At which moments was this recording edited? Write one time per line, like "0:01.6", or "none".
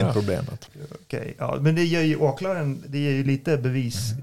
none